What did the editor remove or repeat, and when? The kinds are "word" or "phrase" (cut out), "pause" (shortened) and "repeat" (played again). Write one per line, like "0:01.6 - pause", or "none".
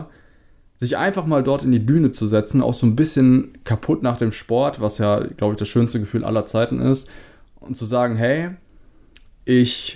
none